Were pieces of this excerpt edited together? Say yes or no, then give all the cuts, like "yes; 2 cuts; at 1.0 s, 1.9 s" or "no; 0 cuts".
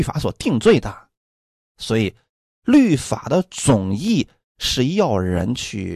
no; 0 cuts